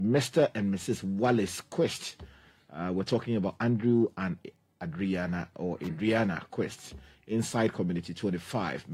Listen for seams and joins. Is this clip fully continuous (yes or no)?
yes